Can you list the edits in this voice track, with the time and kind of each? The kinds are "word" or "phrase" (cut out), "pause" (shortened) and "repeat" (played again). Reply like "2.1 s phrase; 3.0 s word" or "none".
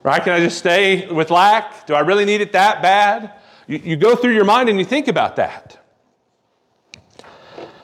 none

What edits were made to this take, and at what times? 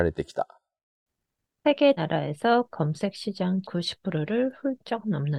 2.0 s word; 2.7 s word; 3.6 s word

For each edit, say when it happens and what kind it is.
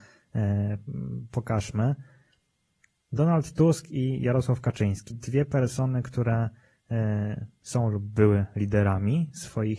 5.1 s word

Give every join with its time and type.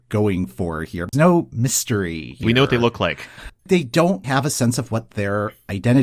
1.1 s word; 2.4 s word; 4.2 s word

